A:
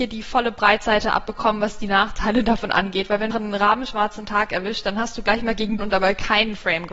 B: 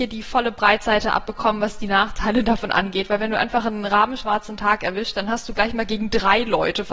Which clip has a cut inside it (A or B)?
A